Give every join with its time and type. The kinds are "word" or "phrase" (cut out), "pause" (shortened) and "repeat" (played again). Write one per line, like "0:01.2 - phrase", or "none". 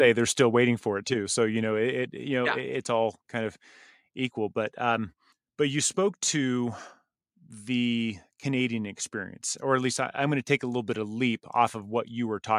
0:05.3 - pause
0:09.6 - word